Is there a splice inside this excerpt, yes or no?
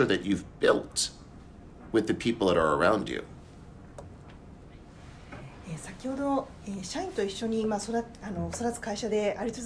no